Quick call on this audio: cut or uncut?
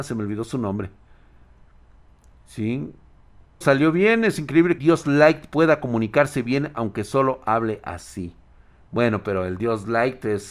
cut